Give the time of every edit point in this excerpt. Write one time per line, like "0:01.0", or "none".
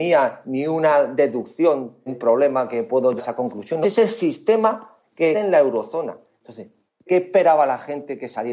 0:02.1
0:03.2
0:03.8
0:05.3
0:07.1